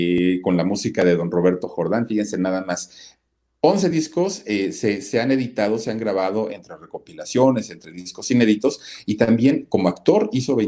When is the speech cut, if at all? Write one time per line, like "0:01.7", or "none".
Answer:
none